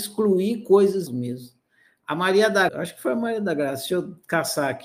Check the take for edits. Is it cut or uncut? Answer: cut